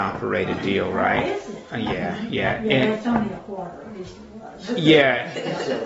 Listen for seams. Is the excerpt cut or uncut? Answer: uncut